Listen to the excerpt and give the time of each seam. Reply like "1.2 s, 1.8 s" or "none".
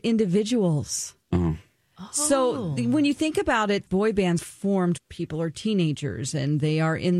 1.2 s, 3.9 s, 4.4 s, 5.0 s